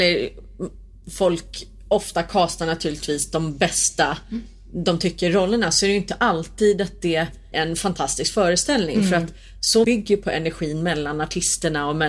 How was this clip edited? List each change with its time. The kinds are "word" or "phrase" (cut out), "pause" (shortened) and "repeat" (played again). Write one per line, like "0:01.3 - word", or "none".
0:07.5 - phrase
0:09.8 - word